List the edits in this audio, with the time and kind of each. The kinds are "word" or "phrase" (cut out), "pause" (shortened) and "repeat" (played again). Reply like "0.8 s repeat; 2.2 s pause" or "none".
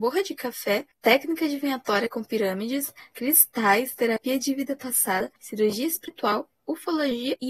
0.9 s pause; 5.4 s pause